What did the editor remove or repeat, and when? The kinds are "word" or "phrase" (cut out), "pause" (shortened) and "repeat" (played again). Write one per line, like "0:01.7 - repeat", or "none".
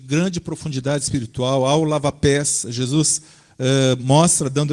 none